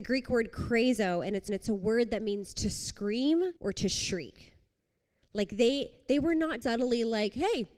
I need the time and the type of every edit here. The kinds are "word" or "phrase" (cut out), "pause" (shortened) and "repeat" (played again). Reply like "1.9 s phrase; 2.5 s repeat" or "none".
1.5 s repeat; 3.6 s pause; 6.6 s word